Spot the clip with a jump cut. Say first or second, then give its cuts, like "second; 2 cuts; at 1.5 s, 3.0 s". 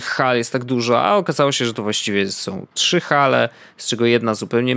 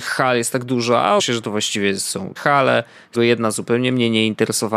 second; 3 cuts; at 1.2 s, 2.4 s, 3.1 s